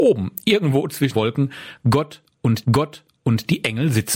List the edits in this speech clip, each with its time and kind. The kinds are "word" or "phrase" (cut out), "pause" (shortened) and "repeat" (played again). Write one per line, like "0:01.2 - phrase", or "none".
0:01.1 - word
0:02.6 - repeat